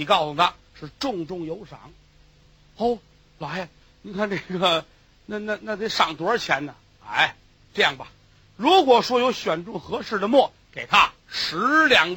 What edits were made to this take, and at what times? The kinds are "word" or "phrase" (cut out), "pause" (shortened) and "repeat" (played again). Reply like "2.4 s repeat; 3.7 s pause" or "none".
11.2 s pause